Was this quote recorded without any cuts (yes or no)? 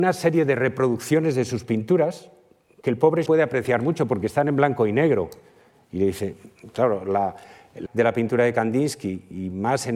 no